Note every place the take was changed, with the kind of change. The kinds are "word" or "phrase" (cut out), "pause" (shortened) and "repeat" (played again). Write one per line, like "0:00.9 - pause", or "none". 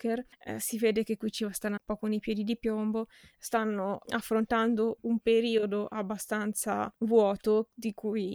0:01.8 - word